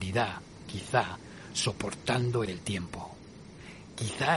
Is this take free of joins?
no; 1 cut; at 2.4 s

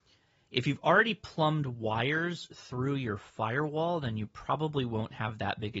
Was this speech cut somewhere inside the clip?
no; 0 cuts

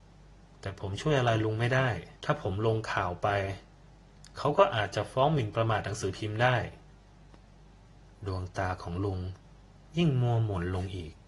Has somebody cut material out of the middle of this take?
yes; 1 cut; at 2.2 s

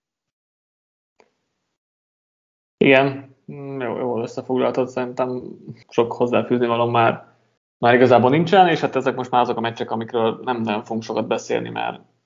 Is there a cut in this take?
yes; 2 cuts; at 5.8 s, 7.6 s

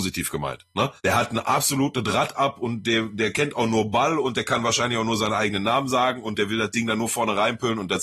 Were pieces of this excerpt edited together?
yes; 1 cut; at 1.0 s

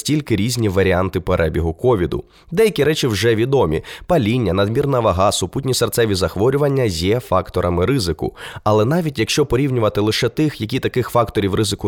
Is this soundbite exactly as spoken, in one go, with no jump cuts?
yes; 0 cuts

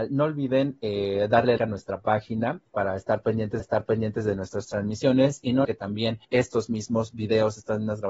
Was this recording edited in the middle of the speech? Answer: yes; 5 cuts; at 1.6 s, 2.7 s, 3.6 s, 5.6 s, 6.2 s

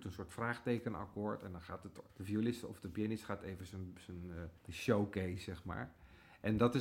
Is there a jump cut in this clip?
yes; 2 cuts; at 2.1 s, 4.6 s

